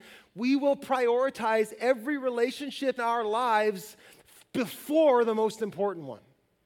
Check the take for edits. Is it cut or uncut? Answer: cut